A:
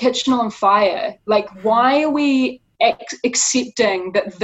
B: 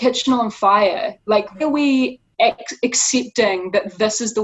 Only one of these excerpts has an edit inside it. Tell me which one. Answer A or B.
B